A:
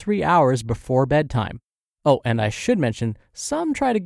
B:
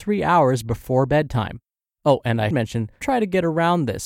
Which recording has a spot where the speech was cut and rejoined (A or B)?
B